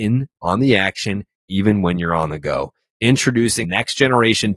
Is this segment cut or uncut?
cut